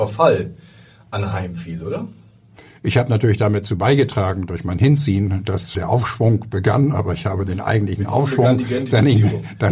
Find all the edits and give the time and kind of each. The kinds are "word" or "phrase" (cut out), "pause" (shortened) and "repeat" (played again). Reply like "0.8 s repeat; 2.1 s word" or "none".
5.7 s word